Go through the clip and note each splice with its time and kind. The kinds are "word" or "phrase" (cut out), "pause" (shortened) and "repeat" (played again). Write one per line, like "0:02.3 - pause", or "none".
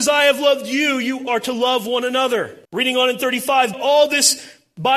0:01.3 - word
0:02.6 - pause
0:03.7 - word